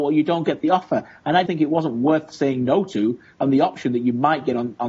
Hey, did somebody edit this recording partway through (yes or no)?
yes